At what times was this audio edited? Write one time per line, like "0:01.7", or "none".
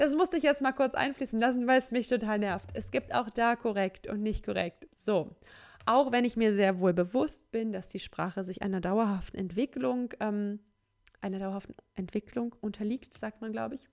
none